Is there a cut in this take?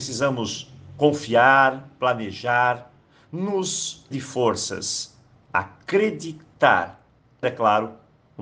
yes; 2 cuts; at 4.1 s, 7.4 s

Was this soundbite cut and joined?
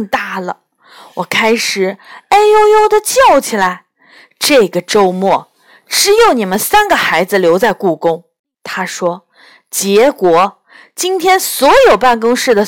no; 0 cuts

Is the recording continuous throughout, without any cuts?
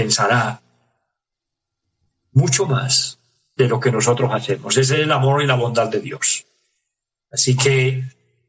yes; 0 cuts

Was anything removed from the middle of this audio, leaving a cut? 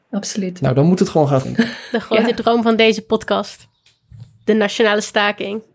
yes; 1 cut; at 1.4 s

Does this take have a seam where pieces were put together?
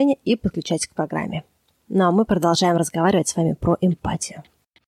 no; 0 cuts

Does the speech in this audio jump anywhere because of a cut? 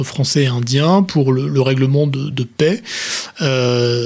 no; 0 cuts

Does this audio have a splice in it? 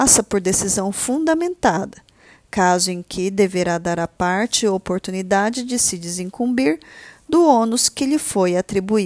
no; 0 cuts

